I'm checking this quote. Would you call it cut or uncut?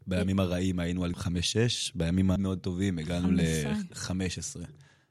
cut